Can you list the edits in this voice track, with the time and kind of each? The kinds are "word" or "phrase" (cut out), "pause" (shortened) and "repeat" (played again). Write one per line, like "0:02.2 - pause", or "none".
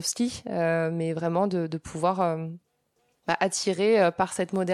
none